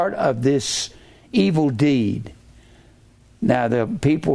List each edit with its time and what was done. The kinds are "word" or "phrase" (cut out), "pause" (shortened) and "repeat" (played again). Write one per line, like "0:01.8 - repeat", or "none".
none